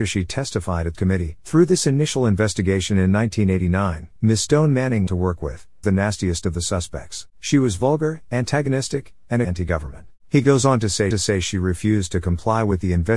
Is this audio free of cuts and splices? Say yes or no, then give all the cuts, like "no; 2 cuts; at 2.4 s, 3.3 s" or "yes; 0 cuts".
no; 9 cuts; at 0.9 s, 1.4 s, 4.2 s, 5.1 s, 5.8 s, 7.3 s, 9.4 s, 10.2 s, 11.1 s